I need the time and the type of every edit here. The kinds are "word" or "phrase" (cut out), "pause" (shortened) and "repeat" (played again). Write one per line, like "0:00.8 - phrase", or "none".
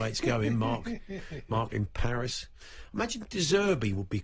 none

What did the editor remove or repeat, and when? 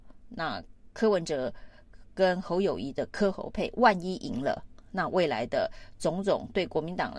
0:00.9 - pause

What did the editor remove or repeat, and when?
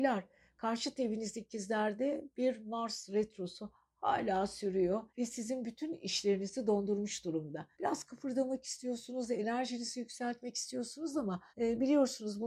0:05.1 - pause
0:07.7 - pause
0:11.5 - pause

